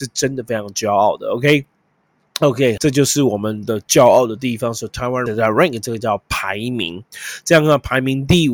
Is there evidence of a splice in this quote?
yes; 2 cuts; at 2.8 s, 5.3 s

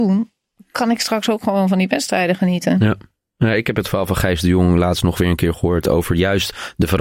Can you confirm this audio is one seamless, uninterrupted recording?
yes; 0 cuts

